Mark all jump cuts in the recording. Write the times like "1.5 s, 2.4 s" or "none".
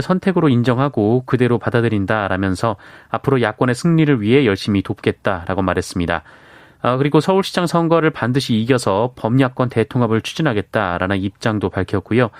none